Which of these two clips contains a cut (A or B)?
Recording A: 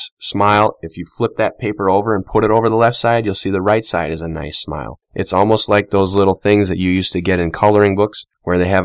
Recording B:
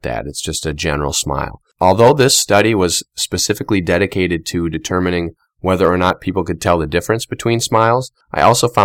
A